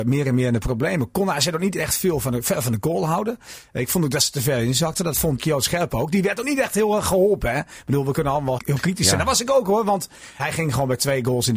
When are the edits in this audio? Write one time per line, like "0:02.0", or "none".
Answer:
0:05.4
0:08.6
0:10.4